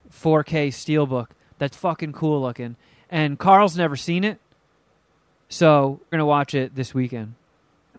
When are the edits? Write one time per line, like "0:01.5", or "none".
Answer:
0:01.7
0:06.1